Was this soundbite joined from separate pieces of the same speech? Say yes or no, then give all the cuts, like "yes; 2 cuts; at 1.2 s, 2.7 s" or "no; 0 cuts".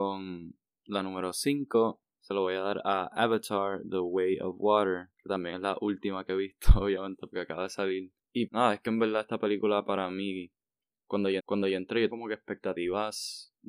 yes; 4 cuts; at 2.1 s, 8.5 s, 11.4 s, 12.1 s